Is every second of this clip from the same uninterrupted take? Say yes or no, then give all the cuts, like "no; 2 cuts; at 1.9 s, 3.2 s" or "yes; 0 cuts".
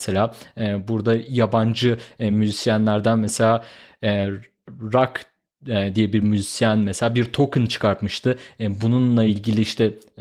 yes; 0 cuts